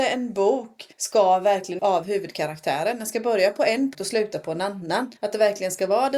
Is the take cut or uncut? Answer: cut